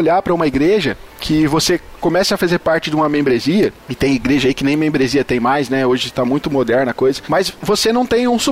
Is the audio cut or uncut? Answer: uncut